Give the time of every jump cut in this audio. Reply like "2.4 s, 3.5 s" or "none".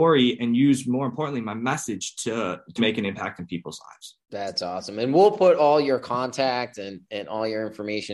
2.8 s, 4.2 s